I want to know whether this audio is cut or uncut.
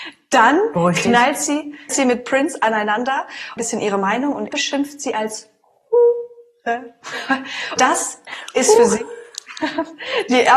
cut